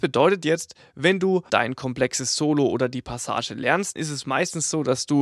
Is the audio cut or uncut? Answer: cut